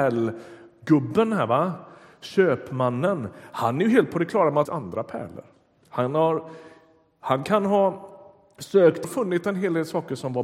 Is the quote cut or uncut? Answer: cut